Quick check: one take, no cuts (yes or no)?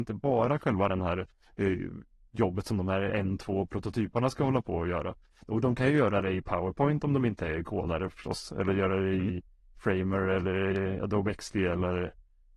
yes